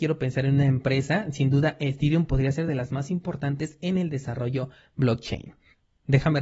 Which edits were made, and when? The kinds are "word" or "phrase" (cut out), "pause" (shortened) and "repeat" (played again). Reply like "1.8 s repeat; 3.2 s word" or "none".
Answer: none